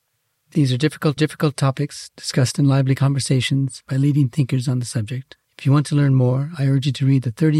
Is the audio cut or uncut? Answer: cut